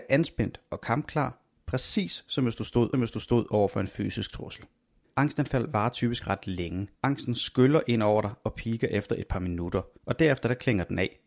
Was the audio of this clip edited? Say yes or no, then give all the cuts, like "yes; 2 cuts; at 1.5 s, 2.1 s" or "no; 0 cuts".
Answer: yes; 5 cuts; at 2.9 s, 5.0 s, 6.2 s, 6.9 s, 10.0 s